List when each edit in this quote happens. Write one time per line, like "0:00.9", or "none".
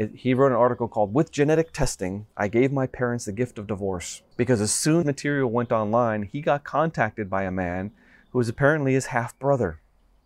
0:02.3
0:04.3
0:05.0